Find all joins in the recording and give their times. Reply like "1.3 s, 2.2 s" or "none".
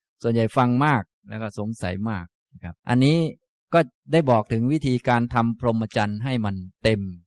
2.8 s, 3.5 s